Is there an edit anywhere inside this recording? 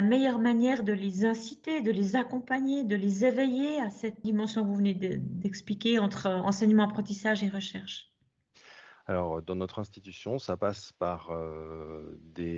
yes; 1 cut; at 4.2 s

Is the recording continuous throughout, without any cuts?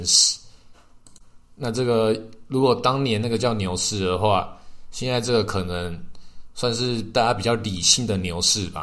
yes; 0 cuts

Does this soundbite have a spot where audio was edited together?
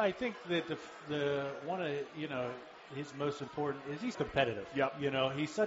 yes; 1 cut; at 4.1 s

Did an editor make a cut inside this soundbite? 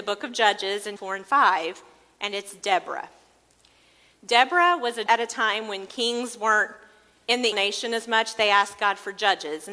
yes; 3 cuts; at 1.0 s, 5.1 s, 7.5 s

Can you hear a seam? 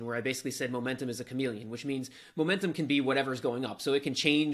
no; 0 cuts

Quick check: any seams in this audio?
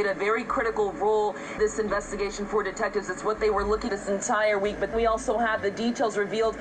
yes; 3 cuts; at 1.6 s, 3.9 s, 4.9 s

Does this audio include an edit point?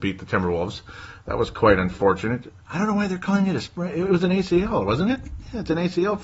yes; 1 cut; at 2.6 s

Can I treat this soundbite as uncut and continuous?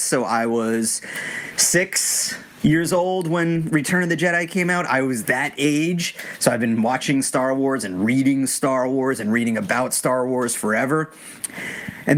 yes; 0 cuts

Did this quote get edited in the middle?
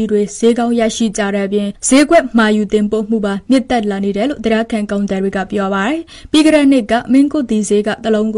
no; 0 cuts

